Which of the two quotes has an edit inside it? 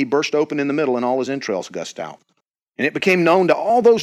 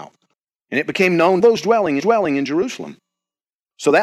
second; 2 cuts; at 1.4 s, 2.0 s

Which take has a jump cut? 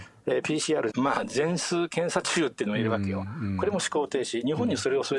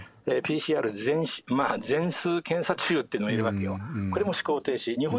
first; 1 cut; at 0.9 s

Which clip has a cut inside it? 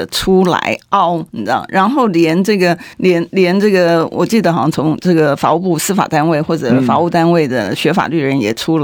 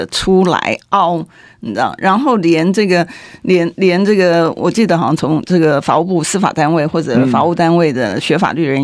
first; 2 cuts; at 1.3 s, 2.9 s

